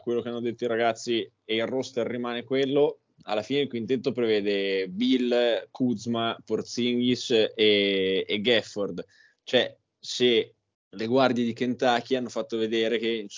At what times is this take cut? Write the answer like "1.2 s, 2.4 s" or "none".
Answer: 10.7 s